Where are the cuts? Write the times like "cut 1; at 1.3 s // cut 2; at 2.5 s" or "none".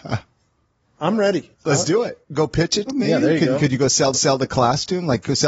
cut 1; at 1.0 s // cut 2; at 1.5 s // cut 3; at 2.2 s // cut 4; at 2.9 s // cut 5; at 4.1 s

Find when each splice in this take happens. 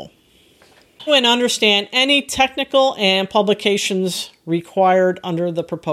cut 1; at 1.1 s

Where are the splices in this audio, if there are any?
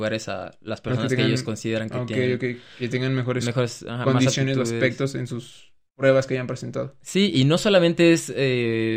none

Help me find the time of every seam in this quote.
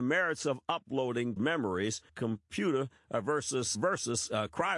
cut 1; at 1.4 s // cut 2; at 2.1 s // cut 3; at 3.7 s

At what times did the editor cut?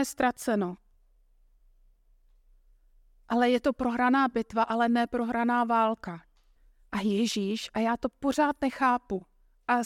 cut 1; at 6.6 s

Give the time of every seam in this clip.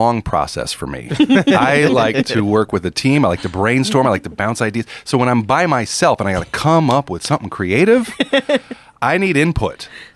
none

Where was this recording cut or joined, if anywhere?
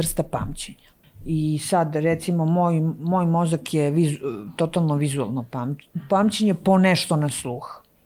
cut 1; at 1.0 s

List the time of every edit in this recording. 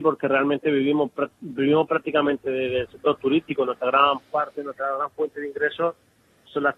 none

